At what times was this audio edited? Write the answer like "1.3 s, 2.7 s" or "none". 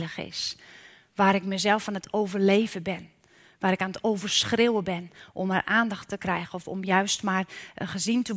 none